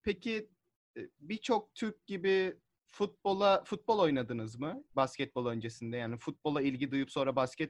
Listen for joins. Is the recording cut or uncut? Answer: cut